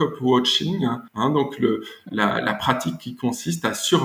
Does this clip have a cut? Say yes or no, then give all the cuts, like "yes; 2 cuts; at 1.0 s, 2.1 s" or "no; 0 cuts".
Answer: yes; 1 cut; at 1.1 s